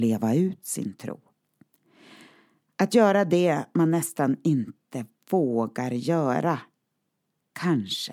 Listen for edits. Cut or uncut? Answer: uncut